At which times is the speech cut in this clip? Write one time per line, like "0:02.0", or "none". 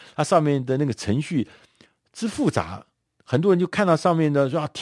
none